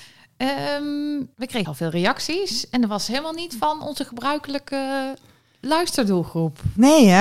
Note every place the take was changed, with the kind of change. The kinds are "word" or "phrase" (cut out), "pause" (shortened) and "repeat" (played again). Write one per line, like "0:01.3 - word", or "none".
0:01.3 - pause
0:01.6 - word